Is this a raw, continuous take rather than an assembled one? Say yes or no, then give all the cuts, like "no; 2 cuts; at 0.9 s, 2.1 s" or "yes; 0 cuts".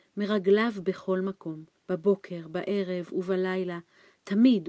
no; 1 cut; at 1.8 s